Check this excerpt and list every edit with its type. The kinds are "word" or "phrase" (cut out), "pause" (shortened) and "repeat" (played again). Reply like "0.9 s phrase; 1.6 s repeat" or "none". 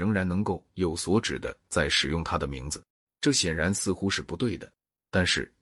2.9 s pause

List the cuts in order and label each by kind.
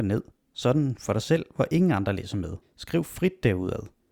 2.6 s pause

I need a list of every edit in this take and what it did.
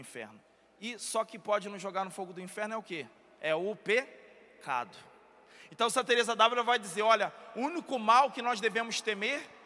none

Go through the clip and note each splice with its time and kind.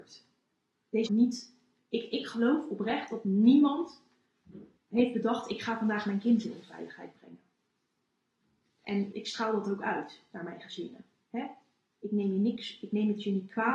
1.1 s phrase; 4.8 s pause; 9.1 s word

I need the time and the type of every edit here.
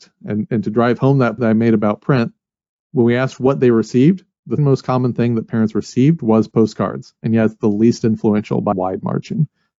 1.4 s word; 4.6 s word; 8.7 s word

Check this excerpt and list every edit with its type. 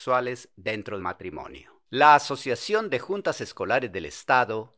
1.0 s word; 1.9 s pause

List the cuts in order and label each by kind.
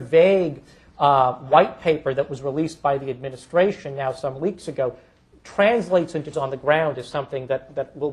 6.3 s word

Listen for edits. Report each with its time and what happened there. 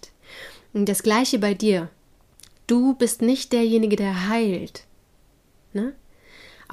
2.1 s pause

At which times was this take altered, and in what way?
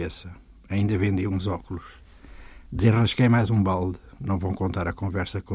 none

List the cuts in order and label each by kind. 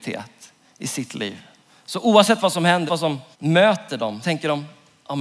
1.6 s pause; 2.9 s word; 3.3 s pause; 4.2 s word

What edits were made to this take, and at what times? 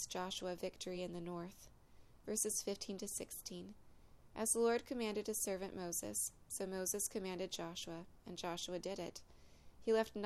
none

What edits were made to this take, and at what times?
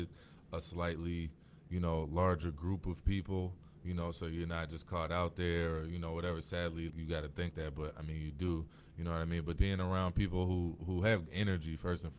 6.9 s word; 7.5 s word; 9.6 s word; 11.3 s word

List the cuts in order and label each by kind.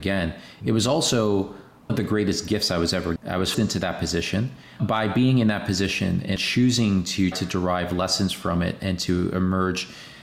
1.9 s word; 3.2 s word; 3.5 s word; 4.8 s word; 6.4 s word; 7.3 s word

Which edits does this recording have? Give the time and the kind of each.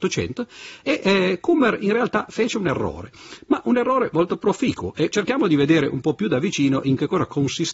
5.1 s word

